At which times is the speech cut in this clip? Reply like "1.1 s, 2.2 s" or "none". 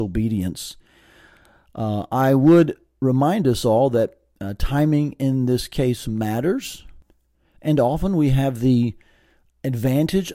none